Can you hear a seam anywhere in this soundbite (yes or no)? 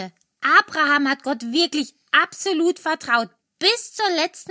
no